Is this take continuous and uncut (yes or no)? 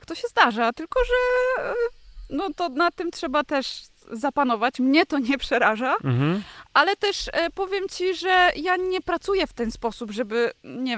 yes